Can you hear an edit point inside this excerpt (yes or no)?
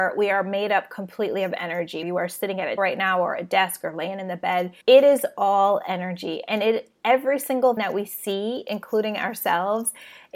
yes